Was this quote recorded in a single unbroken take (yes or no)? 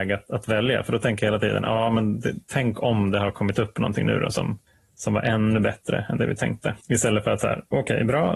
no